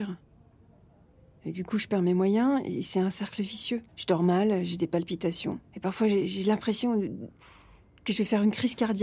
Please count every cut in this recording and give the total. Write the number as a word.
two